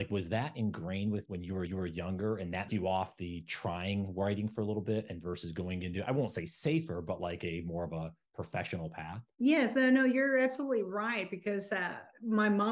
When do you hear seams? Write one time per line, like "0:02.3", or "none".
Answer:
0:01.3
0:01.7
0:02.7
0:09.3